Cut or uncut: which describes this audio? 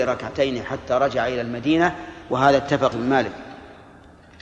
cut